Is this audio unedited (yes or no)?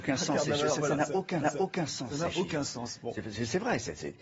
no